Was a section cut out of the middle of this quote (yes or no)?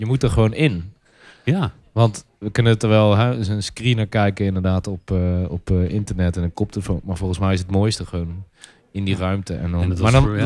no